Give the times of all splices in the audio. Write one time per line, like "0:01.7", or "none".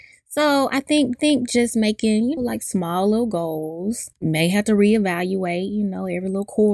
0:01.1
0:02.4
0:04.1